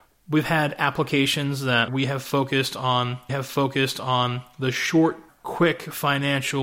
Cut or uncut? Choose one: cut